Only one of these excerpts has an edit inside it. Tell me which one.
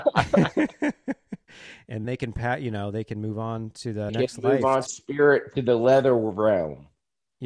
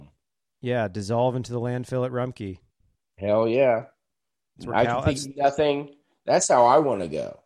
first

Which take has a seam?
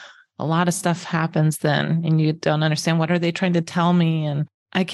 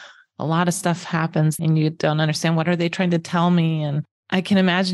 second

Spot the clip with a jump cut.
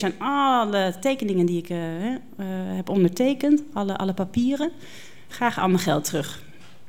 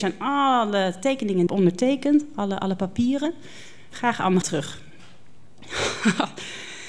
second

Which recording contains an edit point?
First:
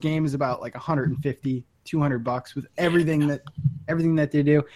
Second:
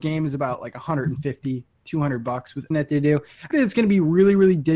second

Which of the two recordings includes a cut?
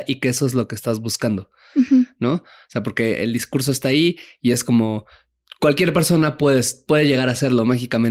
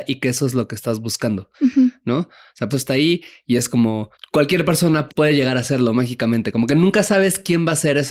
second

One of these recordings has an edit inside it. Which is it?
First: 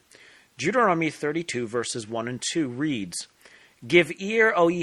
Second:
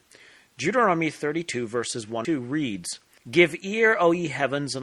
second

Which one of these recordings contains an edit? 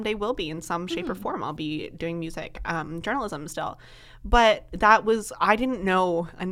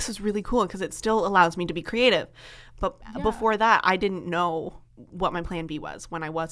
second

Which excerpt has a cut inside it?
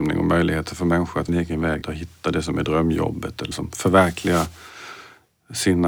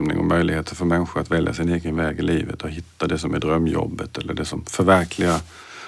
first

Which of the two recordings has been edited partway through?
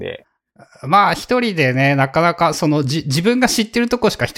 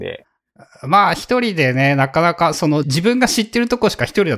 second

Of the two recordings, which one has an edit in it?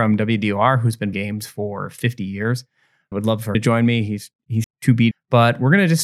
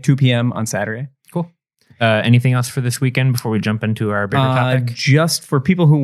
first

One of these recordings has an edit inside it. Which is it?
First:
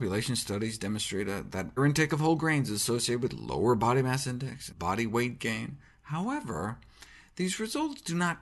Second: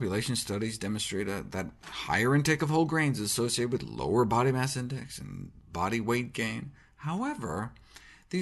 first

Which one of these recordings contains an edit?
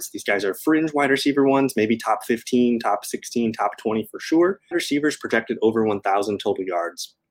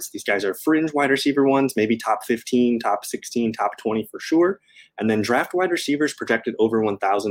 first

